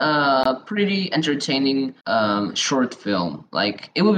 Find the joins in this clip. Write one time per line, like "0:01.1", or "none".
0:02.0